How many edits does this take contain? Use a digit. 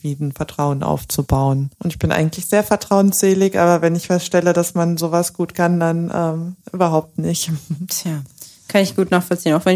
2